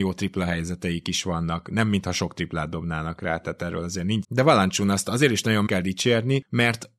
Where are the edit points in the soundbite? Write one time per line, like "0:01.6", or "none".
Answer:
0:04.2
0:05.7